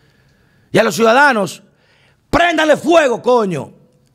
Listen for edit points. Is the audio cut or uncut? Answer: uncut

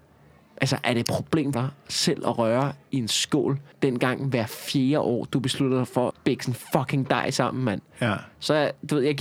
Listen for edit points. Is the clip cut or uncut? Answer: cut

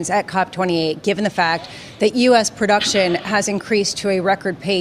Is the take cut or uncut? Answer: uncut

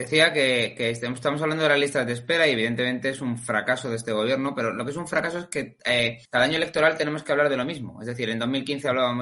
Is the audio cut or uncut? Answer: cut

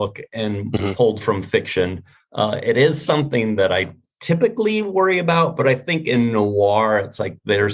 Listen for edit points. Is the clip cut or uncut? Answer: uncut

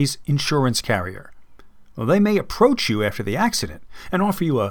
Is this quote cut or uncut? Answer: uncut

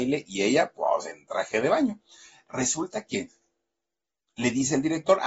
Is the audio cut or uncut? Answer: uncut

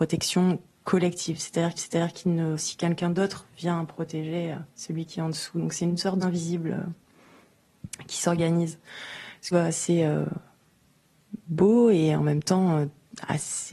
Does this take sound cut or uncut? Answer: cut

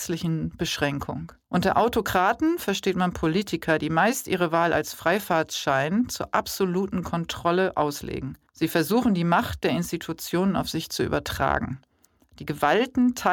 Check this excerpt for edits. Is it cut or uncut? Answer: cut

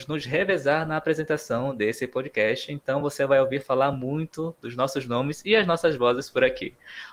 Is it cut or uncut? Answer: uncut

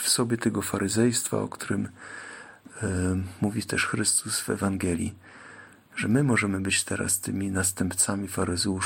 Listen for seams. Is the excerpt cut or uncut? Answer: uncut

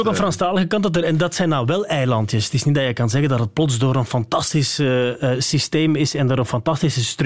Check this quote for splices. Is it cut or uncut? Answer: uncut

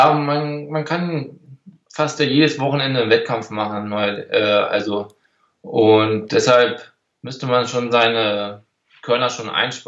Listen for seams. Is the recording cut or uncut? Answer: uncut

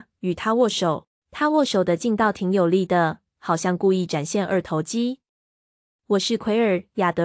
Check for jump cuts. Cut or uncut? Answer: cut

